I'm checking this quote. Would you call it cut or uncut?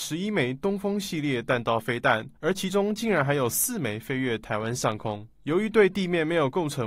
cut